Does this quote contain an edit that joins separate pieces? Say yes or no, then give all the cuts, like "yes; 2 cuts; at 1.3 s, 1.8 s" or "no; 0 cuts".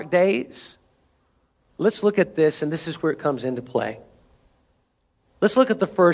no; 0 cuts